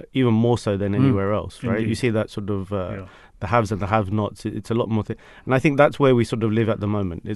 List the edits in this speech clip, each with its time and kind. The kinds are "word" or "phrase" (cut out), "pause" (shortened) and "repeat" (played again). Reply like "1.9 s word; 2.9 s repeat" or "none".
none